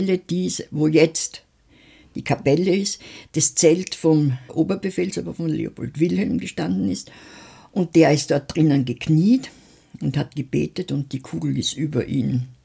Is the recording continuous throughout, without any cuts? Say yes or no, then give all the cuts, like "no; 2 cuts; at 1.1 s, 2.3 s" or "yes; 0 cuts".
no; 1 cut; at 4.5 s